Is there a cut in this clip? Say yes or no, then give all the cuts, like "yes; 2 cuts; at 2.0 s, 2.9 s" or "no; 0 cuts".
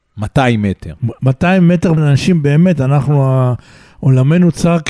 yes; 1 cut; at 2.0 s